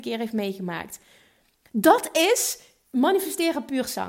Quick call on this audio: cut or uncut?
uncut